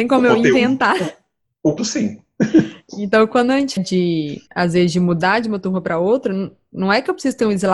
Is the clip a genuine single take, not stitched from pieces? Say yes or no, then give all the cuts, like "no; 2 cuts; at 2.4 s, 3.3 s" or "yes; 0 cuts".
no; 3 cuts; at 1.8 s, 3.8 s, 4.5 s